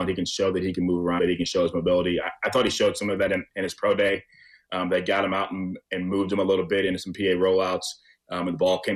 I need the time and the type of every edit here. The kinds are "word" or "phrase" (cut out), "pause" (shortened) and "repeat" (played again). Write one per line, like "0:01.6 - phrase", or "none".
0:01.2 - phrase